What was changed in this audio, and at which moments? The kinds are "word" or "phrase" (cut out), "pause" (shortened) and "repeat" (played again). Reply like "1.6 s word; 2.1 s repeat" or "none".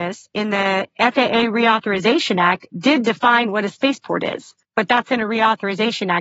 4.6 s pause